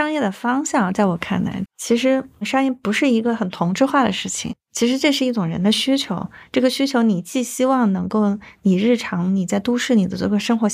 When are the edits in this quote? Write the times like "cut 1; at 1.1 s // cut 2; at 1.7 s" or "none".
cut 1; at 1.6 s